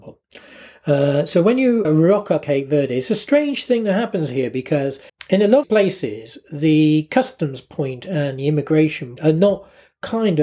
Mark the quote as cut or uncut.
cut